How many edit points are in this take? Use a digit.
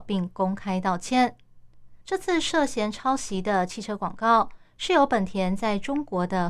1